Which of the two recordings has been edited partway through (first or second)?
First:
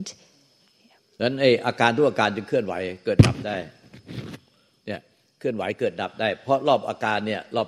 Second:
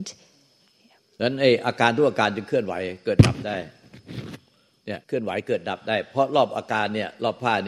second